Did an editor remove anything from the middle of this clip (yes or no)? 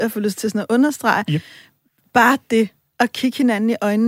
no